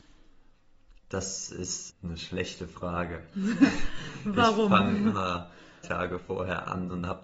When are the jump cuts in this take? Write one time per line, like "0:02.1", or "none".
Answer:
0:01.0
0:01.9
0:05.8